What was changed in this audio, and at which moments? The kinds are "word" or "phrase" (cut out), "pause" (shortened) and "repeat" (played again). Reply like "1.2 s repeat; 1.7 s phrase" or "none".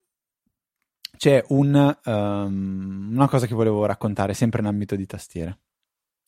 none